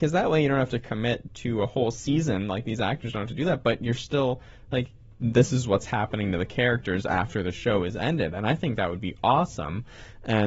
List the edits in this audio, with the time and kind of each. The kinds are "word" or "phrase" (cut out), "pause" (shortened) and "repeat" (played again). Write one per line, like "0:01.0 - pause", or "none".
none